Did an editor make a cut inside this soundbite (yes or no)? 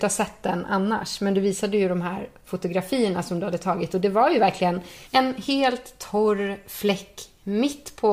yes